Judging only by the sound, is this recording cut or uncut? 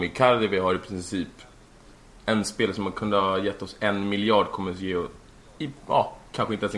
uncut